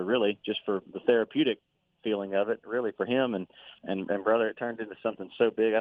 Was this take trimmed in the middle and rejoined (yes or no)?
yes